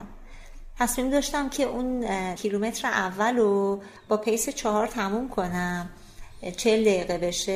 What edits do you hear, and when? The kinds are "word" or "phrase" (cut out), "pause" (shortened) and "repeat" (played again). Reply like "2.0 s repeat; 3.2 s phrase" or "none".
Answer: 2.4 s word; 4.0 s pause